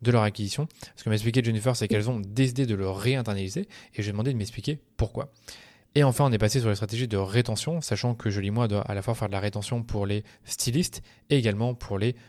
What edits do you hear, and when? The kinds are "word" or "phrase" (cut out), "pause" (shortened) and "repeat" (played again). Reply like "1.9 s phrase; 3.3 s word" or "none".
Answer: none